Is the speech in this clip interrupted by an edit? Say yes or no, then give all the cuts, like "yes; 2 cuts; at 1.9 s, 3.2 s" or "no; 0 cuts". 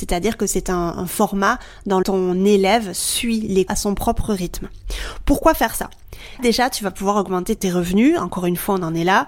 yes; 5 cuts; at 0.9 s, 2.0 s, 3.7 s, 6.4 s, 7.6 s